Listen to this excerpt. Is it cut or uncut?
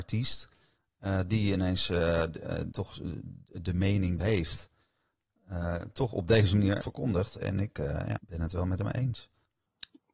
cut